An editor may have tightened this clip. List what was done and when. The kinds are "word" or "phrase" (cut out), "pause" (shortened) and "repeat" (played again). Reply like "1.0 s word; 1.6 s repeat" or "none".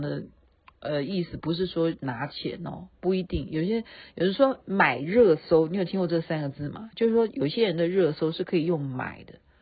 none